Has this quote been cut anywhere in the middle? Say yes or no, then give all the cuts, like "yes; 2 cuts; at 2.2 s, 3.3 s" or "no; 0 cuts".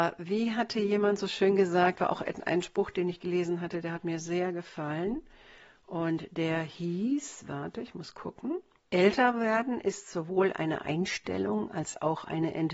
no; 0 cuts